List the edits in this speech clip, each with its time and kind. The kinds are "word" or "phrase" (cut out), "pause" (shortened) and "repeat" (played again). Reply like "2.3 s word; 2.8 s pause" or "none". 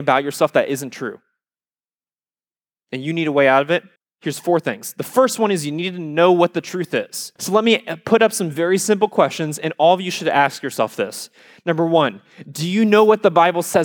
4.0 s pause; 7.4 s pause